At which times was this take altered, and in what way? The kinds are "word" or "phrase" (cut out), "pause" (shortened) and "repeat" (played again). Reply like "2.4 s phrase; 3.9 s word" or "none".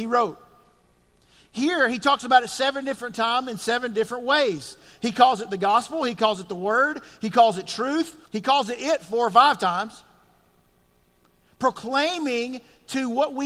8.2 s pause